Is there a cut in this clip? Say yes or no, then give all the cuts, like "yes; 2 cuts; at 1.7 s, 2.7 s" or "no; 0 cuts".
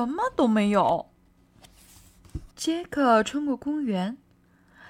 yes; 1 cut; at 2.5 s